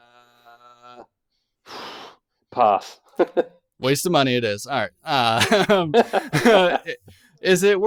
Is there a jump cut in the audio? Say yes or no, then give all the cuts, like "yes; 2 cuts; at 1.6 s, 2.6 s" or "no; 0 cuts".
no; 0 cuts